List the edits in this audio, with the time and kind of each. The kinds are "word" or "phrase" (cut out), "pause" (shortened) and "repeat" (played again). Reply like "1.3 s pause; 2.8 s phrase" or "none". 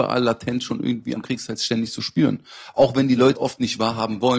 1.2 s word; 3.3 s word